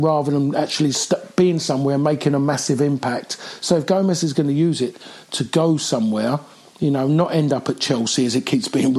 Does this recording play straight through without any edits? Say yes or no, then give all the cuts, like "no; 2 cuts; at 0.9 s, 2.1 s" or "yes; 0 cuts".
yes; 0 cuts